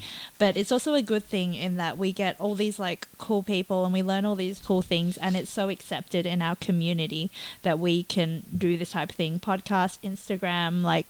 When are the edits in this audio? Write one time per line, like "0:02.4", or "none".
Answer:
0:04.6